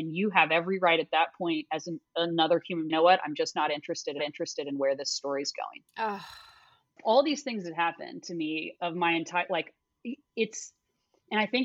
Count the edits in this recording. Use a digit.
3